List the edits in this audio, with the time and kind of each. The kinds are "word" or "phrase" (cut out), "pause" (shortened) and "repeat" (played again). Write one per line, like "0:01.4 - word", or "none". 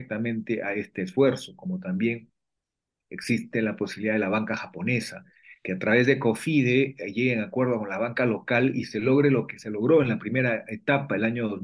none